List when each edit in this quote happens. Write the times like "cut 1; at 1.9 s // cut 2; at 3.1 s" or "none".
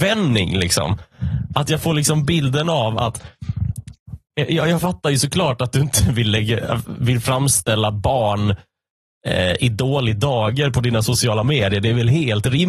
none